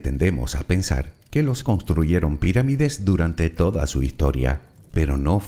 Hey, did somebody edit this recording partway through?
yes; 1 cut; at 1.6 s

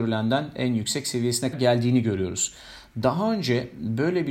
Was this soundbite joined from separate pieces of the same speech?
yes; 1 cut; at 1.5 s

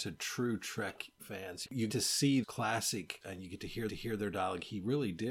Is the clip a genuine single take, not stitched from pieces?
no; 5 cuts; at 1.2 s, 1.9 s, 2.4 s, 3.2 s, 3.9 s

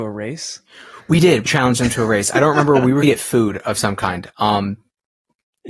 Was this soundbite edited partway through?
yes; 2 cuts; at 1.5 s, 3.0 s

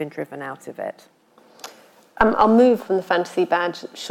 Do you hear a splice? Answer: yes; 1 cut; at 2.8 s

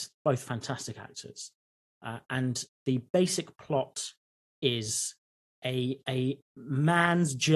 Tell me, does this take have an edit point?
yes; 2 cuts; at 2.7 s, 5.5 s

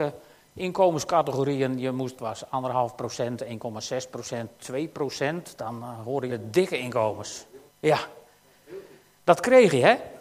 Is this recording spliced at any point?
yes; 3 cuts; at 2.2 s, 6.3 s, 7.7 s

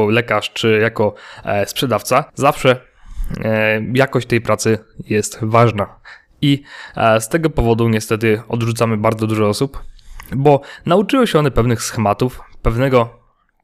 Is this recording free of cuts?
no; 1 cut; at 2.3 s

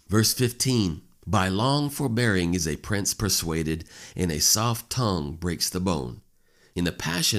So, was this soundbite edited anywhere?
no; 0 cuts

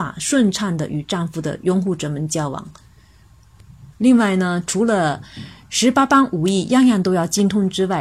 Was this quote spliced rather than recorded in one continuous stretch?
yes; 1 cut; at 3.9 s

